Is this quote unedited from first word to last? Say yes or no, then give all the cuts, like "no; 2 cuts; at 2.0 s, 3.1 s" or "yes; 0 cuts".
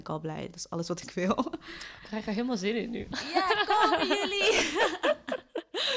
yes; 0 cuts